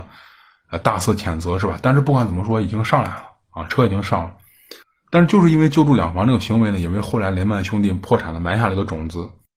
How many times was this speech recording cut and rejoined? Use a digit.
1